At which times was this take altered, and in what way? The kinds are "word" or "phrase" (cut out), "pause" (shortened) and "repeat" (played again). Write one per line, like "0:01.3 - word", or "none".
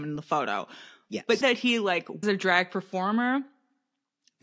0:01.4 - word
0:02.2 - word

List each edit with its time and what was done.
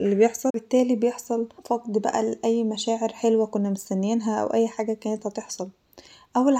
0:01.6 - pause

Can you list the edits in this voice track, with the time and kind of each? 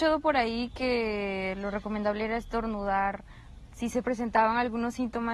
none

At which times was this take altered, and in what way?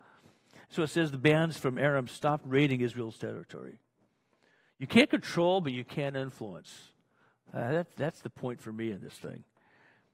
none

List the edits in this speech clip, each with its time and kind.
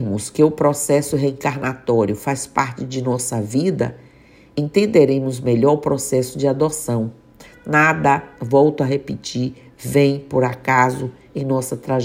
none

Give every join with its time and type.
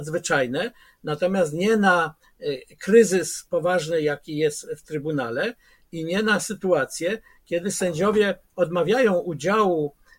none

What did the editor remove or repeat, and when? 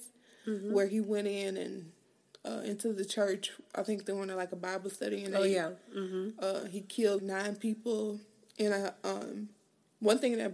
0:07.2 - word

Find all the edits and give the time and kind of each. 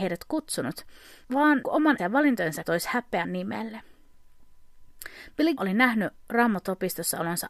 0:01.2 - word
0:01.6 - word
0:02.0 - word
0:02.6 - word
0:03.2 - word
0:05.6 - word

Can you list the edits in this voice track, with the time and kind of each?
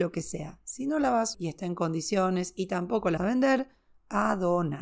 0:01.3 - word
0:03.2 - word

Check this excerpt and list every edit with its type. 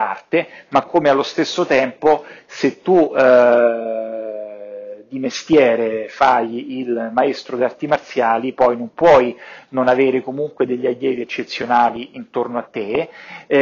none

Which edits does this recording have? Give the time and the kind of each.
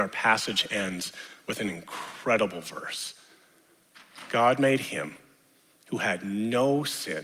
none

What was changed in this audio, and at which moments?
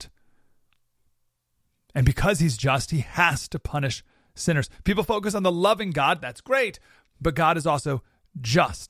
none

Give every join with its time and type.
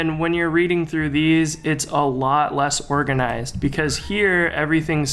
none

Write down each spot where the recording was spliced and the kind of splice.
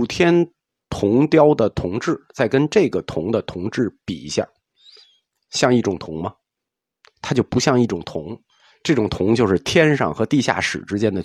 none

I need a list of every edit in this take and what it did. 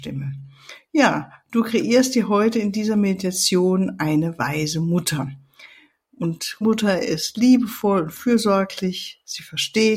0:06.6 - phrase

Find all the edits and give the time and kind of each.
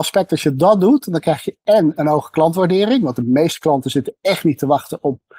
none

